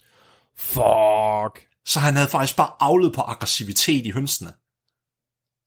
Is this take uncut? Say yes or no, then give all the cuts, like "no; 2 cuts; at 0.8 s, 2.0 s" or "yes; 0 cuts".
yes; 0 cuts